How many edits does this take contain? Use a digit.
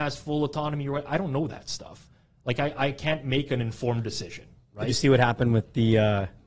0